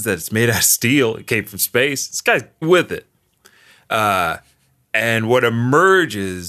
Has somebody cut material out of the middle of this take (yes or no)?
yes